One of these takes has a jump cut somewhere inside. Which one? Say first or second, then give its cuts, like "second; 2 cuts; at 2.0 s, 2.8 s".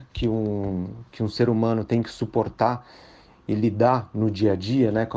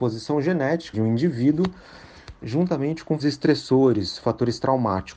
second; 3 cuts; at 0.9 s, 2.4 s, 3.2 s